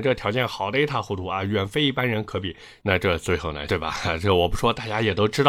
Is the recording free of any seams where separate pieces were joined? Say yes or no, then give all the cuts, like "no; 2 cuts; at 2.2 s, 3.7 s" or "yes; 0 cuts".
no; 1 cut; at 3.7 s